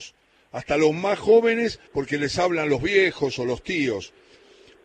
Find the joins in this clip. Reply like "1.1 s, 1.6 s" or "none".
1.9 s